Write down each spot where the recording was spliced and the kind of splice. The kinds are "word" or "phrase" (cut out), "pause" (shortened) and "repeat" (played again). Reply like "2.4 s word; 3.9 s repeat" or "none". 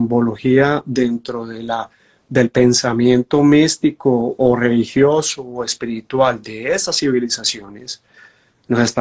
none

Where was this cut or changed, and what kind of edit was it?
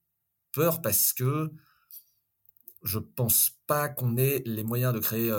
none

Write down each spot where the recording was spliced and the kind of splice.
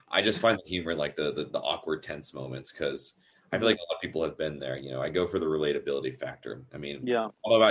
none

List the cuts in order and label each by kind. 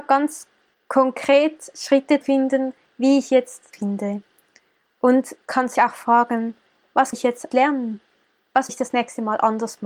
2.2 s word; 3.7 s word; 5.4 s word; 5.7 s word; 7.1 s word; 7.5 s word; 8.7 s word

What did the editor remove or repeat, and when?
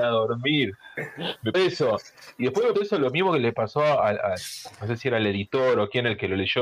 1.5 s word; 2.7 s word

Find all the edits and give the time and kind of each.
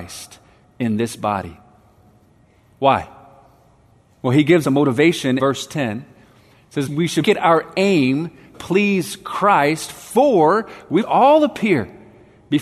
4.6 s word; 5.4 s word; 6.9 s word; 7.2 s word; 8.5 s word; 11.0 s word

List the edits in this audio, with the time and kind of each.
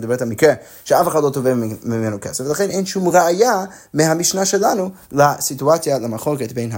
none

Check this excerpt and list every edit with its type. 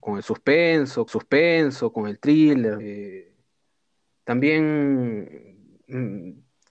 1.1 s repeat; 2.8 s word

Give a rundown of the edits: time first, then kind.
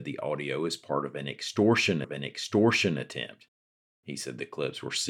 2.0 s repeat

